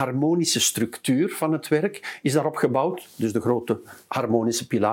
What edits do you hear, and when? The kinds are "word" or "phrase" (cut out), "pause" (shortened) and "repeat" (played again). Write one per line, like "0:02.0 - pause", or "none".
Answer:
none

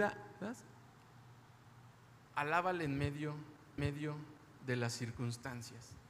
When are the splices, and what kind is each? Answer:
0:02.2 - pause
0:03.8 - repeat

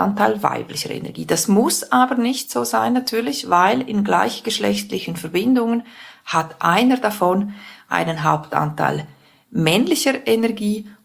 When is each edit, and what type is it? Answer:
none

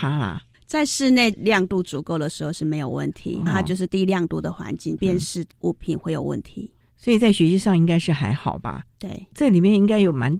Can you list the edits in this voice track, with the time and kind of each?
0:03.5 - word

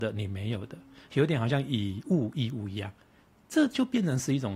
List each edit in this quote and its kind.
none

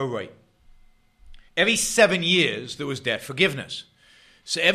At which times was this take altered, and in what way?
0:01.5 - pause

